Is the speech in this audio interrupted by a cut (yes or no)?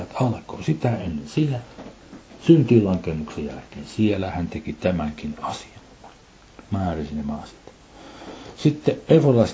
no